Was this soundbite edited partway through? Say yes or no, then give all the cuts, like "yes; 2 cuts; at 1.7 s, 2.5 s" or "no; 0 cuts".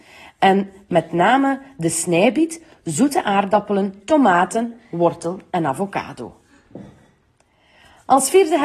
no; 0 cuts